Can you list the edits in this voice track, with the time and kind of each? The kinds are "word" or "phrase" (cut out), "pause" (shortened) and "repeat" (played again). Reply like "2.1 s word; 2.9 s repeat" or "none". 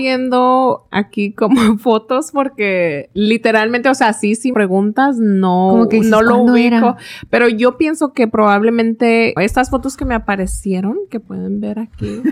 4.5 s phrase; 9.4 s word